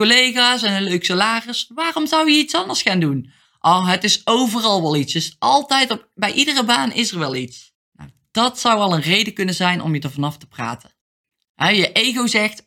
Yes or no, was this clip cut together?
yes